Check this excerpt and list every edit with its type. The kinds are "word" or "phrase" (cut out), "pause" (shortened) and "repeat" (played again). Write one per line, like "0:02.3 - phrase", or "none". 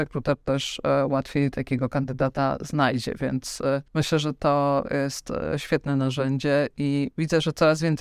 0:03.9 - pause